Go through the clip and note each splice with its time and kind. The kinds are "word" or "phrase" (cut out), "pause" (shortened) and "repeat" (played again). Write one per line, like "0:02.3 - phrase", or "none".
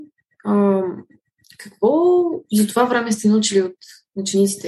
none